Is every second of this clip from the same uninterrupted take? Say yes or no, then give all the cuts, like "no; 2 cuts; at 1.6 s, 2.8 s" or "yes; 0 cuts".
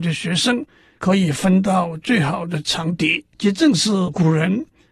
no; 1 cut; at 3.3 s